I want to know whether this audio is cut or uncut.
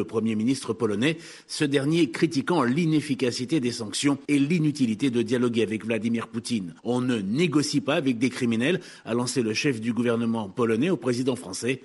cut